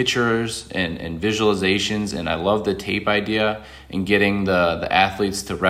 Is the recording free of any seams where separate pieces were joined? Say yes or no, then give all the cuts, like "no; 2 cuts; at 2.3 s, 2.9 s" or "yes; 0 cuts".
yes; 0 cuts